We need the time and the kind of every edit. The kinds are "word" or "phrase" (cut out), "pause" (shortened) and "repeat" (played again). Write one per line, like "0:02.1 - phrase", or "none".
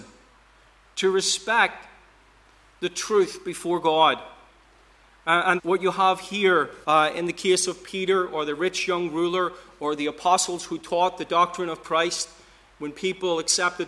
0:05.6 - word
0:06.8 - pause